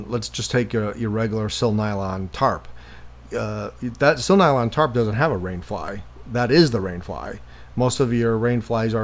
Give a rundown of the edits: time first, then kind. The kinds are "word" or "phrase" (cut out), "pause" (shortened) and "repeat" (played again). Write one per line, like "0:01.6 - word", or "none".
none